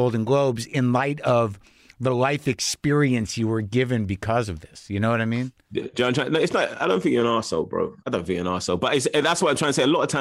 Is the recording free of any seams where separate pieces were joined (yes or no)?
yes